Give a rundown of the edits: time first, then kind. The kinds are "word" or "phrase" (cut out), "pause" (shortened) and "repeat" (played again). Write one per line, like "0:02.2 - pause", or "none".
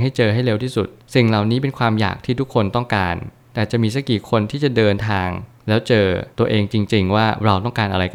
0:06.3 - pause